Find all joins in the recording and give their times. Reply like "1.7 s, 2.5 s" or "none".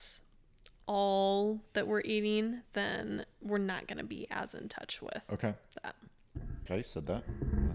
6.7 s